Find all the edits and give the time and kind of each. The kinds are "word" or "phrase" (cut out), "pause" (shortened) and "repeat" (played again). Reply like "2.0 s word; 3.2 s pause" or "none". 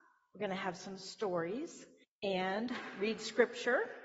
2.0 s pause

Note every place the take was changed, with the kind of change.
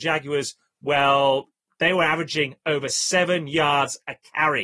none

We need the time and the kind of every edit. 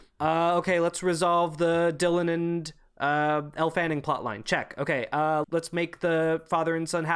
5.4 s word

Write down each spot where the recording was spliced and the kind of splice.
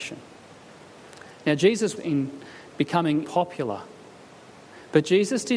2.0 s word; 3.2 s word

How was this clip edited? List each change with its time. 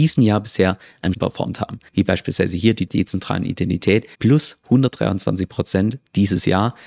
1.1 s word; 1.9 s pause; 2.9 s phrase; 4.1 s pause

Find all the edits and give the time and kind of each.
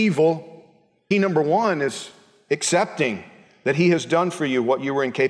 1.1 s phrase

